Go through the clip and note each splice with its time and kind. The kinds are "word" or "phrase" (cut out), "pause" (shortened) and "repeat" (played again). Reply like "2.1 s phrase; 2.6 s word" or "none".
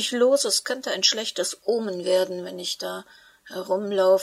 none